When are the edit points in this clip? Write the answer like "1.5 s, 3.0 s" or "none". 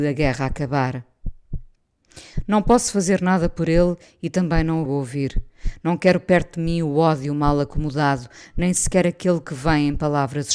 4.9 s